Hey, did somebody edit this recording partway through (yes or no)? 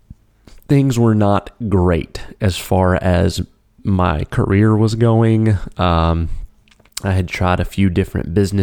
no